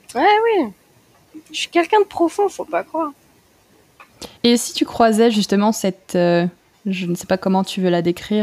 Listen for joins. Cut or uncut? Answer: cut